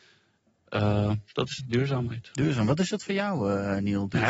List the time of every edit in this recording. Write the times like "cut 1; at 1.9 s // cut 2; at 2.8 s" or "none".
cut 1; at 1.6 s

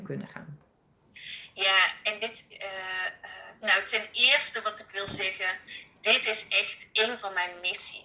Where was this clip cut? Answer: none

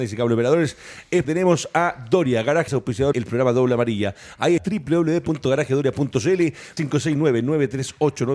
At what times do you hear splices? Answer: cut 1; at 1.2 s // cut 2; at 2.7 s // cut 3; at 3.1 s // cut 4; at 4.6 s // cut 5; at 6.8 s

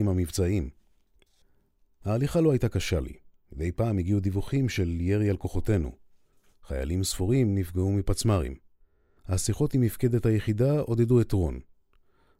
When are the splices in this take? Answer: none

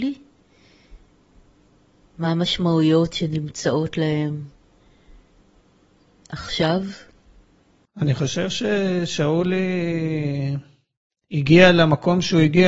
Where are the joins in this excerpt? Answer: none

